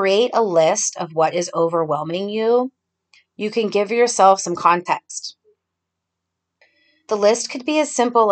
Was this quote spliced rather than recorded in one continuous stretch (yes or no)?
no